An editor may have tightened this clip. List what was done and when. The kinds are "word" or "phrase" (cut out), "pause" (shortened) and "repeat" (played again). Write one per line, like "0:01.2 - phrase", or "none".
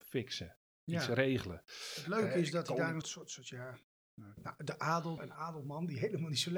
0:03.0 - word
0:04.4 - phrase
0:05.2 - word